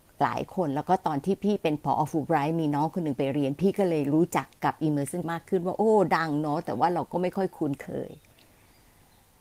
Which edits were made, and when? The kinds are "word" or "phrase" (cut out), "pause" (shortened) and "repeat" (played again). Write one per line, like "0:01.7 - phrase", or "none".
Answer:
0:05.2 - word